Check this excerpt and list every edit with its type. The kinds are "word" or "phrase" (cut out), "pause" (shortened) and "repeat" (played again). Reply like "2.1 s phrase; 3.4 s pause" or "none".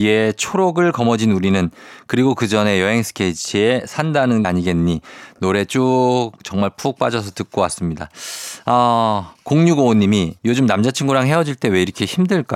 4.4 s phrase; 10.4 s pause